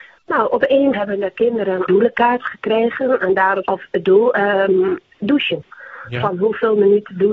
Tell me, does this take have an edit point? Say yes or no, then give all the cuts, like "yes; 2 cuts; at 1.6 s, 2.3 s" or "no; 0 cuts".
yes; 3 cuts; at 0.9 s, 1.9 s, 3.6 s